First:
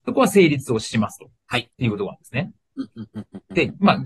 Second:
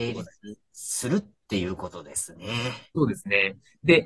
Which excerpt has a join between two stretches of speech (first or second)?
first